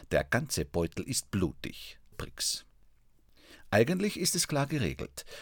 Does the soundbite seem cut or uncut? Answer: cut